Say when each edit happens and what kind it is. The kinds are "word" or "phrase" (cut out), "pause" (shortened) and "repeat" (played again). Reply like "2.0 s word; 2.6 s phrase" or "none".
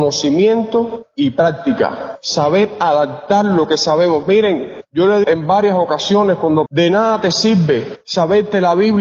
5.2 s word; 6.7 s word